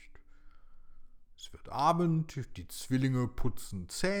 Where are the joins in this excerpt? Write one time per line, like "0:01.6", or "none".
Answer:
none